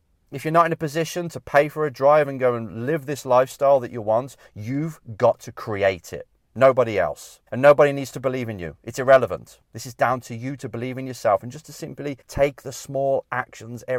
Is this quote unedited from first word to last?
no; 3 cuts; at 7.5 s, 9.6 s, 12.2 s

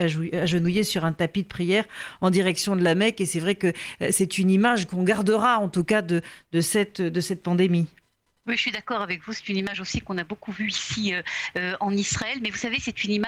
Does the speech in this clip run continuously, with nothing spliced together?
yes; 0 cuts

